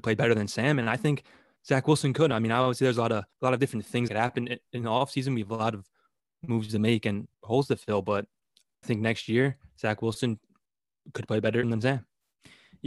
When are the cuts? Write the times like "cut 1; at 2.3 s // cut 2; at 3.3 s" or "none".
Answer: cut 1; at 3.3 s // cut 2; at 4.1 s // cut 3; at 7.3 s // cut 4; at 8.8 s // cut 5; at 11.6 s